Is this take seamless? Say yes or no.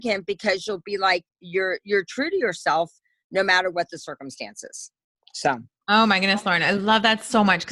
yes